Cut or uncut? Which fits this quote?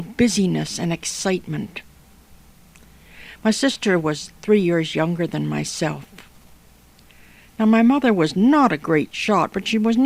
uncut